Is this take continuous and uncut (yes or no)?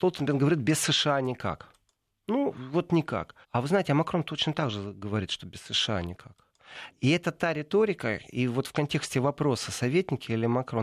no